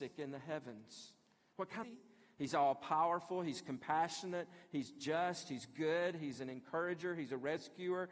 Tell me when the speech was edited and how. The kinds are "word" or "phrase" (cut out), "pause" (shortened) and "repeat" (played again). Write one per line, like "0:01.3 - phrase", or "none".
0:01.8 - phrase